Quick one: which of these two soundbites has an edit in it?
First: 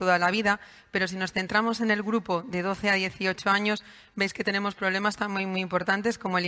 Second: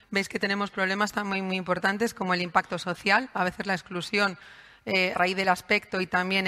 second; 1 cut; at 5.1 s

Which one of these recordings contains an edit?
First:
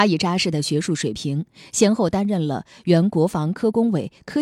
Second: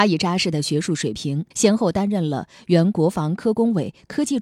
second; 1 cut; at 1.5 s

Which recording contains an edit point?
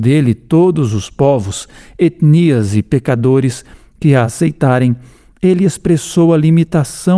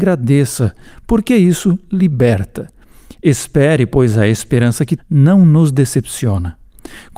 second; 1 cut; at 5.0 s

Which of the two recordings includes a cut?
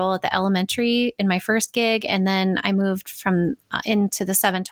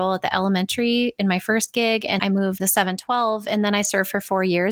second; 2 cuts; at 2.2 s, 2.6 s

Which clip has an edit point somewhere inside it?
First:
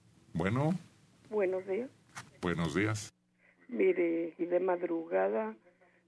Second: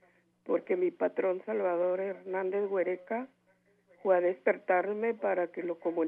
first; 2 cuts; at 2.3 s, 4.4 s

